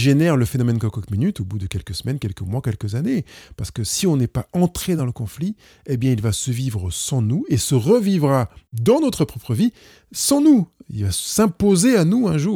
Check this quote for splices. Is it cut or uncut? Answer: uncut